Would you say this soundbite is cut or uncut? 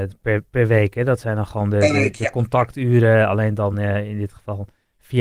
uncut